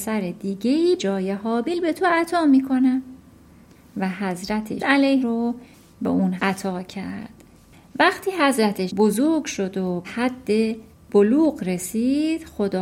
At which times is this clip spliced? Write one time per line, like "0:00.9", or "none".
0:01.0
0:04.8
0:05.2
0:06.4
0:08.9
0:10.0